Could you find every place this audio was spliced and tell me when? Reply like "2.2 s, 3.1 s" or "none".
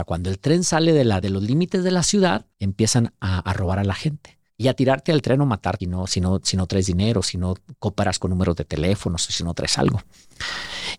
1.2 s, 2.5 s, 4.5 s, 5.8 s